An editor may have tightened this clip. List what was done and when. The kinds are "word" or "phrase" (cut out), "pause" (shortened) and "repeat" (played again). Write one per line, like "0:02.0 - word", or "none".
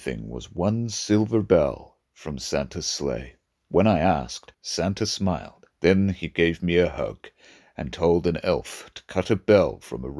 0:03.4 - pause
0:04.5 - pause
0:05.7 - pause